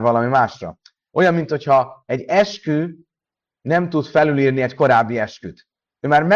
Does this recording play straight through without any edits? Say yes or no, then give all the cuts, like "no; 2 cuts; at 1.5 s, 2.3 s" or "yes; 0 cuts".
yes; 0 cuts